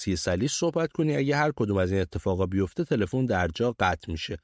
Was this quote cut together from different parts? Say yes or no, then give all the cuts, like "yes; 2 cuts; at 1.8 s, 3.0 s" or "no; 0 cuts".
no; 0 cuts